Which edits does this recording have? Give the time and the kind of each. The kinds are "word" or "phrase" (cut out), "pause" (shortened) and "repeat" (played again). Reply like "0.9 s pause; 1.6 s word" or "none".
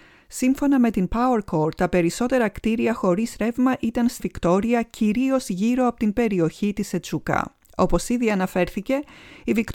4.2 s word; 7.6 s pause